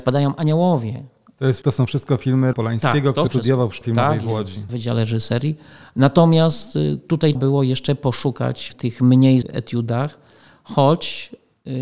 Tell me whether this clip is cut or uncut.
cut